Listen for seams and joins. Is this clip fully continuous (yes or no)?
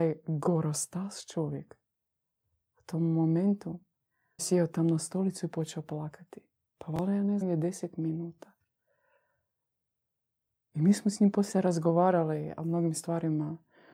no